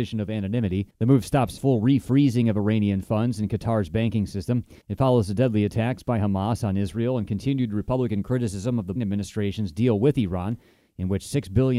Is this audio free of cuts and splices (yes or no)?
no